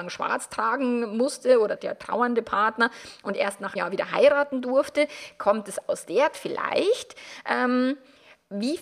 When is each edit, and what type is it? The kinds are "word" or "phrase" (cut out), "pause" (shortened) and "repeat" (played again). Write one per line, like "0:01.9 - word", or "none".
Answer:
0:01.8 - word
0:03.8 - word
0:06.3 - word